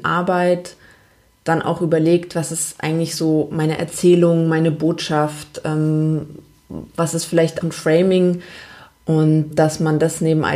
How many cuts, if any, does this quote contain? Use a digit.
2